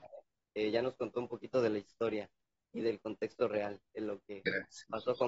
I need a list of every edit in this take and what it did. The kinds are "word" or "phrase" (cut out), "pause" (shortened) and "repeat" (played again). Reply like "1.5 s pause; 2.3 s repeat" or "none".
none